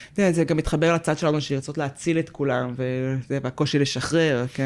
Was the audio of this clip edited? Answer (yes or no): no